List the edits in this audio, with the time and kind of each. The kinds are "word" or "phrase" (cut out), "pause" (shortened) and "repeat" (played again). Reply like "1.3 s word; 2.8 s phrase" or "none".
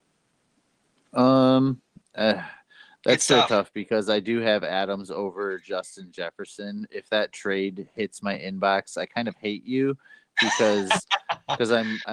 none